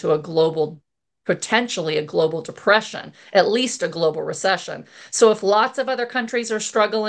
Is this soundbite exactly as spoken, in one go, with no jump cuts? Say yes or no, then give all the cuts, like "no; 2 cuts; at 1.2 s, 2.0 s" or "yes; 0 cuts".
yes; 0 cuts